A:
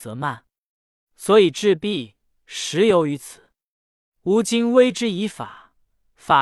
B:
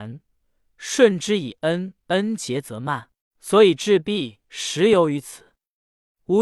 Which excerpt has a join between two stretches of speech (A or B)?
B